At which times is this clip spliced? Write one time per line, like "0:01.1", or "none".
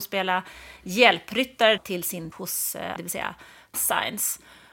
0:01.8
0:02.3
0:03.0
0:03.7

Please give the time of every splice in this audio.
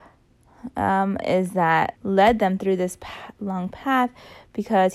0:01.2
0:02.0

